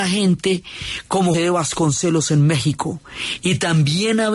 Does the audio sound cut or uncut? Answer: cut